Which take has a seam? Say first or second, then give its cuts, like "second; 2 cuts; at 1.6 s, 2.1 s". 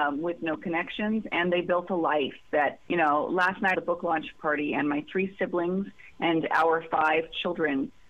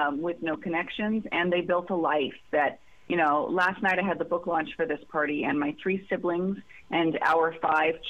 first; 3 cuts; at 2.9 s, 3.7 s, 4.3 s